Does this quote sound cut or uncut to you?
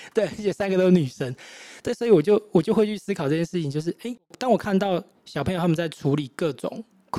uncut